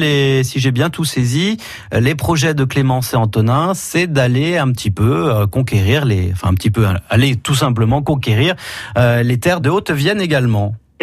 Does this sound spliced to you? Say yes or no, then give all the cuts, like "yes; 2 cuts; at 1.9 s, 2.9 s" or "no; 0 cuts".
yes; 1 cut; at 9.6 s